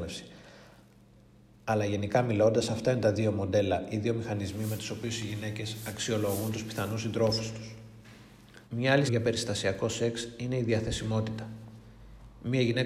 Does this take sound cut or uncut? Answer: cut